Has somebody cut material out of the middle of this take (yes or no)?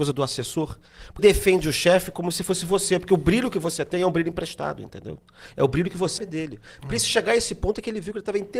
yes